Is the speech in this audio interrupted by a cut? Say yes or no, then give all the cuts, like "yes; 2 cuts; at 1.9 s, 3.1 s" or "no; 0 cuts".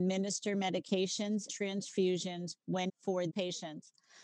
yes; 3 cuts; at 1.5 s, 2.9 s, 3.3 s